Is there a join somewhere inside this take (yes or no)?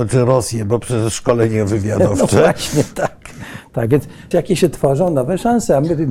yes